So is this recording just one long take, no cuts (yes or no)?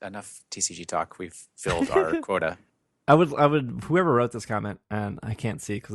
yes